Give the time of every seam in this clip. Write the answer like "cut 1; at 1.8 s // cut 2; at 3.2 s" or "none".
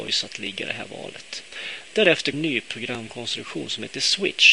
cut 1; at 2.3 s